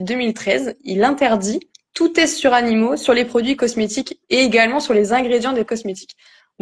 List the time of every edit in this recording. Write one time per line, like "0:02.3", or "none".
0:01.7
0:04.2
0:05.7

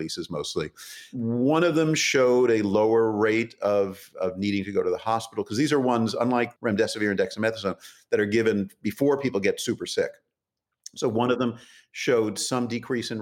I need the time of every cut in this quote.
0:06.6

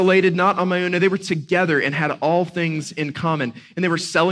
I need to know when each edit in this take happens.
none

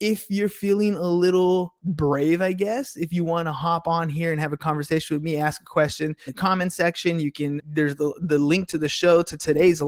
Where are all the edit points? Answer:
0:01.8
0:06.3
0:07.6

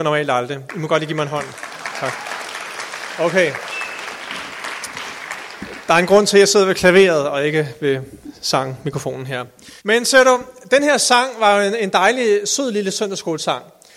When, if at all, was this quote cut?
0:09.8

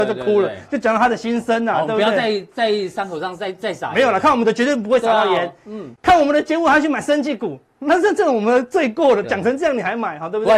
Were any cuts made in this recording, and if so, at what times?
0:06.0
0:09.2

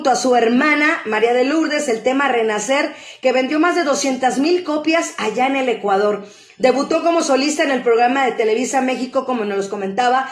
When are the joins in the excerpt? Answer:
none

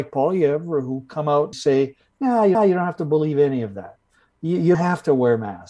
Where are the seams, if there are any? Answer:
0:01.5
0:02.5
0:04.7

